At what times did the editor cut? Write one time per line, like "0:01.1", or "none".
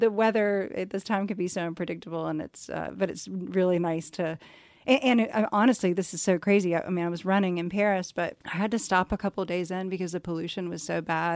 none